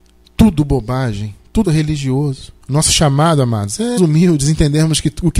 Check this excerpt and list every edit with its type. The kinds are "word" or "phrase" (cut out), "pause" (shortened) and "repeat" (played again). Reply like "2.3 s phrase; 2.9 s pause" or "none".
1.6 s word; 2.6 s pause; 4.0 s word